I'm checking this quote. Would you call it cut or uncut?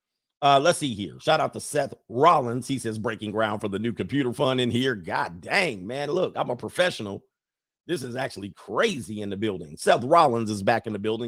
uncut